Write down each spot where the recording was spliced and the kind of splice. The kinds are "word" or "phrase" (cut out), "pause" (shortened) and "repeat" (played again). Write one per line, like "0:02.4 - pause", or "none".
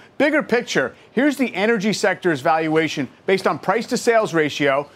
none